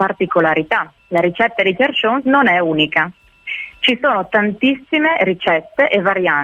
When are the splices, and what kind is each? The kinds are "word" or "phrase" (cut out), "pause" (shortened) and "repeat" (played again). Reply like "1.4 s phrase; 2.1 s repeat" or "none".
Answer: 1.0 s pause